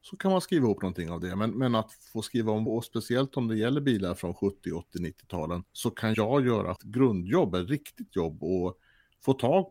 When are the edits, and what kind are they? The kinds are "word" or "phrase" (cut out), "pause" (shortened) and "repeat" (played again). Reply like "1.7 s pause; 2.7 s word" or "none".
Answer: 2.7 s word; 5.7 s pause; 6.1 s word; 6.8 s word; 8.1 s word